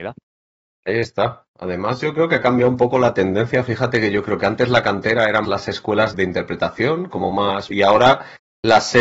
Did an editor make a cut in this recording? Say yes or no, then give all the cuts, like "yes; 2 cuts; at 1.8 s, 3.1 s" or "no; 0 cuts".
yes; 3 cuts; at 5.4 s, 6.1 s, 7.7 s